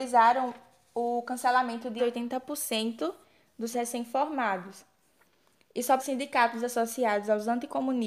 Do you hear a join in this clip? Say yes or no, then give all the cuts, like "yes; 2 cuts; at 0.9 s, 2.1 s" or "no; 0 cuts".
yes; 3 cuts; at 2.0 s, 3.7 s, 6.0 s